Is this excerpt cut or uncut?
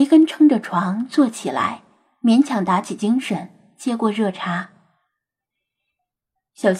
uncut